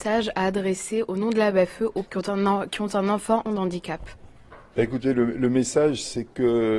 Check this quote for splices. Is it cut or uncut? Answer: cut